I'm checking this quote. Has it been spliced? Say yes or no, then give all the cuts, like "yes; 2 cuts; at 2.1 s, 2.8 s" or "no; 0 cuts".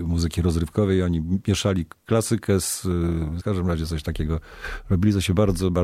yes; 1 cut; at 3.4 s